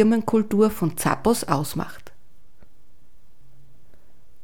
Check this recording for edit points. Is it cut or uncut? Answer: uncut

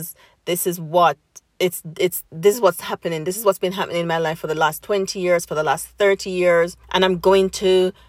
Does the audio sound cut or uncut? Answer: cut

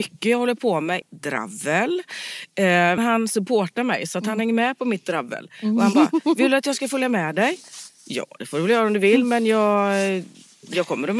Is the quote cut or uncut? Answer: cut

